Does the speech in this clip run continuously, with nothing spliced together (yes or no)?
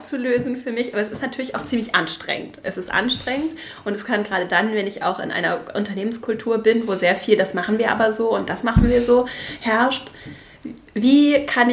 yes